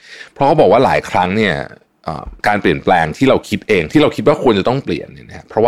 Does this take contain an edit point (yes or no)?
yes